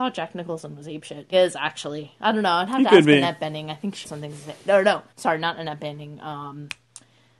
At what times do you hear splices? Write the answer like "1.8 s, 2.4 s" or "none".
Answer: 1.3 s, 4.0 s, 5.1 s